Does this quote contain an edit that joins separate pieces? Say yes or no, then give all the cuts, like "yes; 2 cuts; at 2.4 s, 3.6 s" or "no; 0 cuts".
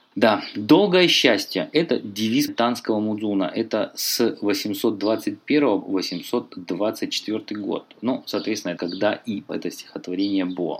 yes; 4 cuts; at 2.5 s, 5.8 s, 8.8 s, 9.5 s